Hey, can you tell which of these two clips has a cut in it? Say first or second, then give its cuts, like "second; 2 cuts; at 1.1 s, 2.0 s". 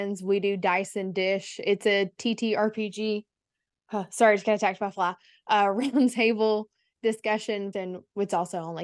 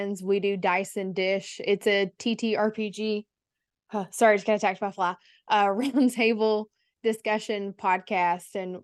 first; 1 cut; at 7.7 s